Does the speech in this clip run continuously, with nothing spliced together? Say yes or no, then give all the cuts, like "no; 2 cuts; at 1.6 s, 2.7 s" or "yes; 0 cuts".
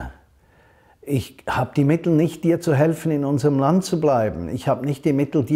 yes; 0 cuts